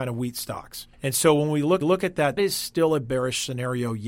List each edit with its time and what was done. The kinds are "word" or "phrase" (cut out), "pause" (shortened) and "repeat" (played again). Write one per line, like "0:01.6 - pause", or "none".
0:00.9 - pause
0:01.8 - repeat
0:02.4 - word